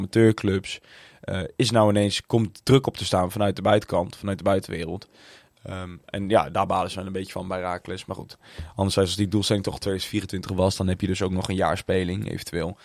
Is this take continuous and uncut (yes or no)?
yes